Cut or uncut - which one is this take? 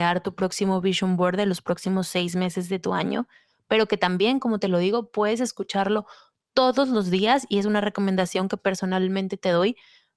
uncut